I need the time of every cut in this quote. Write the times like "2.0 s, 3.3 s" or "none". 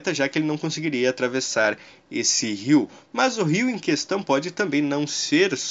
none